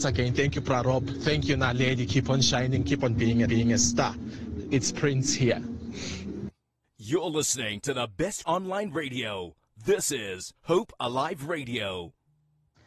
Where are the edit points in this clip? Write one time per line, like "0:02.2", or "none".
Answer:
0:03.5
0:08.4
0:10.6

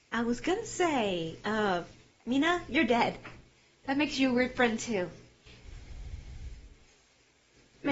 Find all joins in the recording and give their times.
none

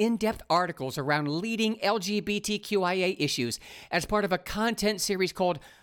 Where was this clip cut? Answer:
none

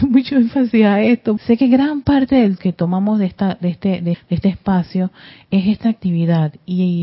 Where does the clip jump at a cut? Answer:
0:01.4
0:02.6
0:04.1

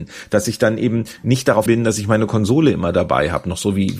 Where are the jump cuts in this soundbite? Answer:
0:01.7

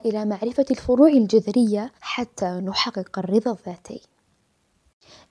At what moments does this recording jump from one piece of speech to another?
0:02.0

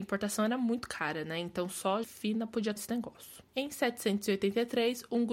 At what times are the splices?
0:02.0
0:02.8
0:03.5

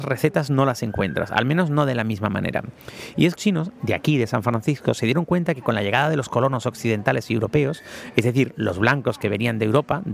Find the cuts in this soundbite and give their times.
0:03.4

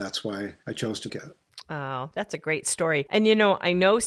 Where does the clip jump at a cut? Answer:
0:01.1

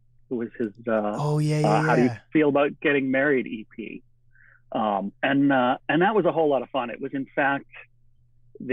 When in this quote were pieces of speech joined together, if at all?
0:05.2

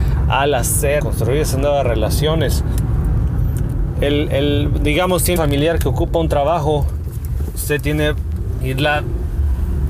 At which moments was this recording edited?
0:01.0
0:05.4
0:08.6

